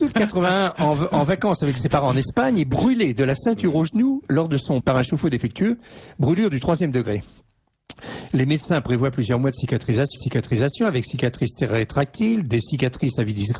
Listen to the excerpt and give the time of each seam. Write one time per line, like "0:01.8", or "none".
0:04.8
0:10.2